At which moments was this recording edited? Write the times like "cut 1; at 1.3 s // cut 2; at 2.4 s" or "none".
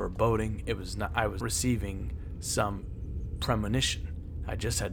cut 1; at 1.4 s